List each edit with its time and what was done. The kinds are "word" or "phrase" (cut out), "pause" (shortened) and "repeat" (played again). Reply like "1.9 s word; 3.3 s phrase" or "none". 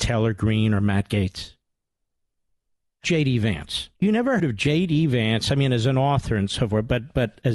3.0 s word; 3.9 s pause; 4.4 s word